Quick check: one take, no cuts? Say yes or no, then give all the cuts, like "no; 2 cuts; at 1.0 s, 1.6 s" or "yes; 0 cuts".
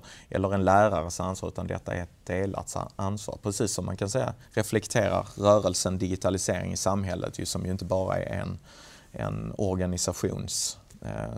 no; 1 cut; at 4.4 s